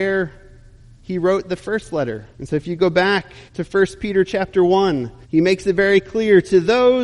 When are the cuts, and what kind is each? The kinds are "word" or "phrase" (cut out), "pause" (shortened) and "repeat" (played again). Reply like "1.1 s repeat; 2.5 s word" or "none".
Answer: 2.3 s pause; 3.5 s pause; 5.2 s pause